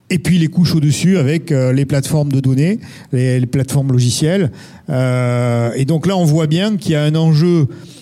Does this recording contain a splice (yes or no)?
no